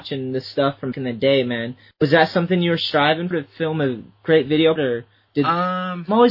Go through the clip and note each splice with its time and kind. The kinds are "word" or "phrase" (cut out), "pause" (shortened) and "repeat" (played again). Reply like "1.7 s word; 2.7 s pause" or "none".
0.9 s word; 3.3 s word; 4.8 s word